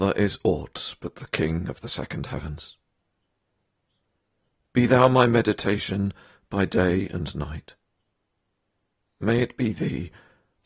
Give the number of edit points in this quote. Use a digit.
0